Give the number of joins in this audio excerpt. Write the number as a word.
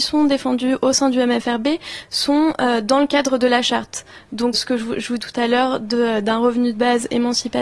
two